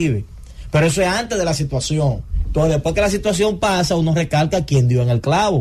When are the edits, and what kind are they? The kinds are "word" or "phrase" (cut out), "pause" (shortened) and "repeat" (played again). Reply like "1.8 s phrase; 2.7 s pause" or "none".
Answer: none